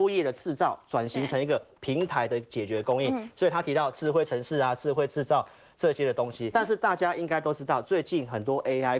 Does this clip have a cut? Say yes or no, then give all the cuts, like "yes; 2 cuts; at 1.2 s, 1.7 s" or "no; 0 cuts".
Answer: yes; 1 cut; at 6.5 s